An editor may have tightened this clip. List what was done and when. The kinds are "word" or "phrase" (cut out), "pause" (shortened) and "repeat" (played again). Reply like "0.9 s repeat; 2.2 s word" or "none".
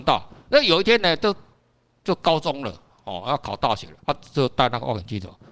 4.0 s pause

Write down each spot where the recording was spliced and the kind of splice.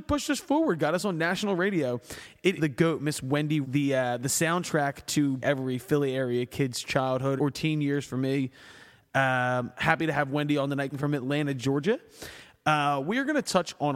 2.6 s word; 3.6 s word; 5.4 s word; 7.4 s word; 10.9 s word

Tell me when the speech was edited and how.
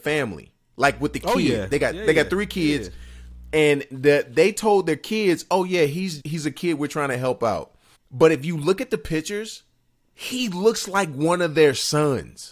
6.2 s word; 7.9 s word

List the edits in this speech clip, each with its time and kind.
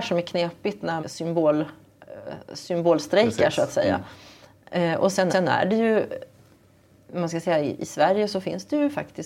1.0 s word; 5.3 s repeat

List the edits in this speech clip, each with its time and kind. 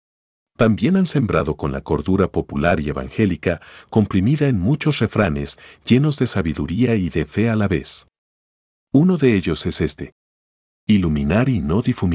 1.8 s word

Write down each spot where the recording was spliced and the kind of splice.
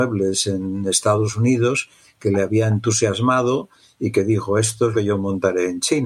4.9 s word

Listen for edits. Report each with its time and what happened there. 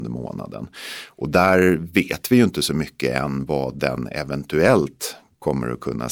none

